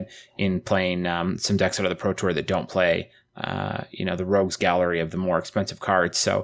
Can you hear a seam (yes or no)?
no